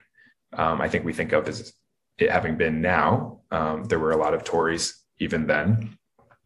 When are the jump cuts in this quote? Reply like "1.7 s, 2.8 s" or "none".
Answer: none